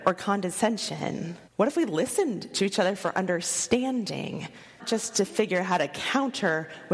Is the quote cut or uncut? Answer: cut